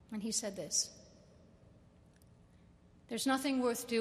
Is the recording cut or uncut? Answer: uncut